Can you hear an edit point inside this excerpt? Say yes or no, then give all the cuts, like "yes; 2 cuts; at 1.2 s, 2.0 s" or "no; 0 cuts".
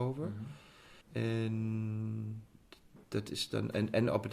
yes; 2 cuts; at 1.0 s, 3.0 s